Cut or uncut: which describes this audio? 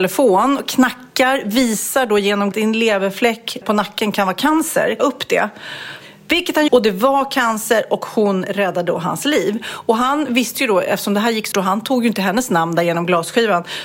cut